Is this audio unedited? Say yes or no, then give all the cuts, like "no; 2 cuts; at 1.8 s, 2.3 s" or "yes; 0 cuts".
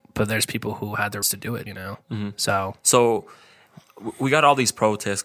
no; 3 cuts; at 1.2 s, 1.7 s, 2.8 s